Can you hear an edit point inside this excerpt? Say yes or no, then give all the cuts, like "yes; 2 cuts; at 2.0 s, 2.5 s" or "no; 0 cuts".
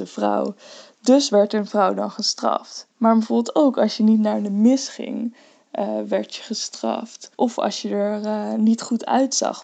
yes; 2 cuts; at 2.9 s, 7.3 s